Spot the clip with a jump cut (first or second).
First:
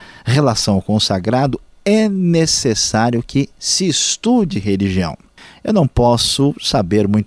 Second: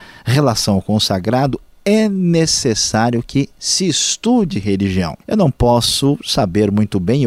second